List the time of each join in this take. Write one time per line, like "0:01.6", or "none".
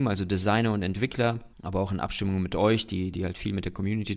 0:01.5